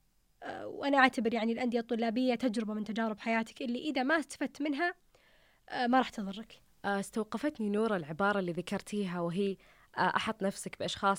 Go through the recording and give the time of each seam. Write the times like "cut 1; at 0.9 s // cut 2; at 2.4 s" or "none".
none